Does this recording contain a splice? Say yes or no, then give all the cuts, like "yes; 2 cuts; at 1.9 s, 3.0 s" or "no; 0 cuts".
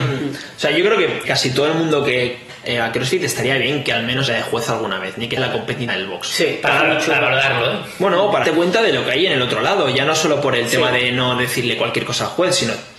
yes; 6 cuts; at 1.2 s, 2.6 s, 4.3 s, 5.4 s, 5.9 s, 8.4 s